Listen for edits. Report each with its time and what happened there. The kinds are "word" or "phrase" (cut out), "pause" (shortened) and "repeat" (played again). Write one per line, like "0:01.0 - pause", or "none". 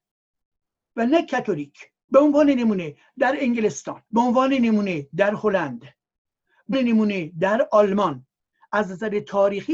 0:02.0 - pause
0:04.1 - pause
0:06.7 - word